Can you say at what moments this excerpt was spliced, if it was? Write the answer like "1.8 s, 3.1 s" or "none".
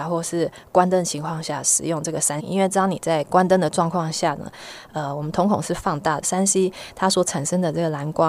2.4 s, 6.2 s